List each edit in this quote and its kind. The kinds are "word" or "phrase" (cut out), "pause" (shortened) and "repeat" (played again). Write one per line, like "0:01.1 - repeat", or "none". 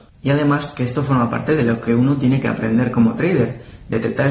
none